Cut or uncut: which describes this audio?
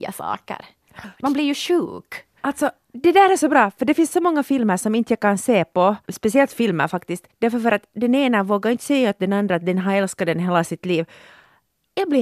cut